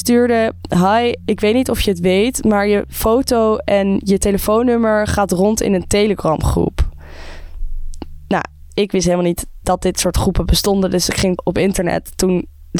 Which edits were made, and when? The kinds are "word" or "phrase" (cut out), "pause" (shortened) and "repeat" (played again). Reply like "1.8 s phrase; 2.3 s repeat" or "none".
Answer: 11.4 s word